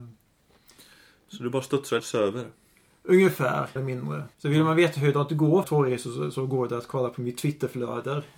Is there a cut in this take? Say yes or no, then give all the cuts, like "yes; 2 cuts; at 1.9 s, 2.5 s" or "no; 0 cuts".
yes; 4 cuts; at 2.0 s, 3.8 s, 4.3 s, 5.6 s